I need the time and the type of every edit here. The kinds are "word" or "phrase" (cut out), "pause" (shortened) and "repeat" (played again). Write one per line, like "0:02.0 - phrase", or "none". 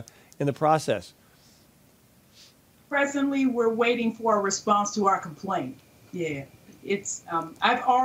none